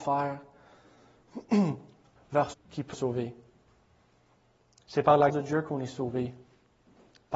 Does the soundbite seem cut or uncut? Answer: cut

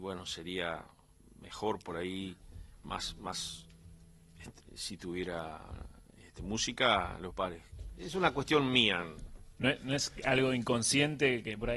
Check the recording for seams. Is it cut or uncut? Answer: cut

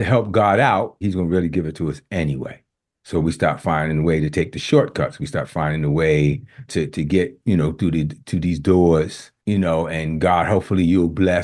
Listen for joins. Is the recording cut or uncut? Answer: cut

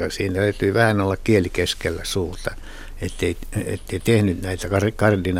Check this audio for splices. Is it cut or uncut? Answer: uncut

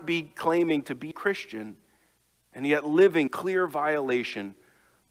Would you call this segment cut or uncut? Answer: cut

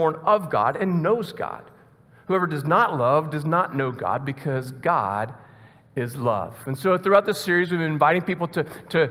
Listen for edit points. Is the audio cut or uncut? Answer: uncut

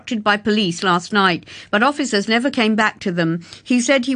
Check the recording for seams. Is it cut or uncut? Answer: uncut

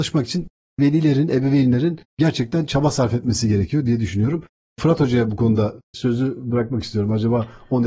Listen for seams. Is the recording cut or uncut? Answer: cut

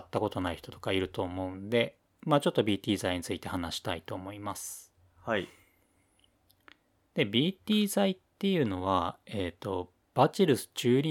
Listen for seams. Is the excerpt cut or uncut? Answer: uncut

